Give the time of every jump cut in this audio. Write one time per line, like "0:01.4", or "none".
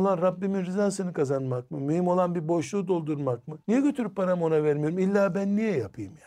0:03.6